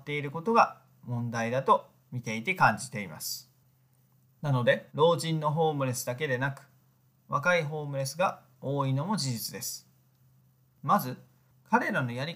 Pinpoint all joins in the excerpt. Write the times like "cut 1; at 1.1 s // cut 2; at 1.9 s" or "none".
cut 1; at 4.9 s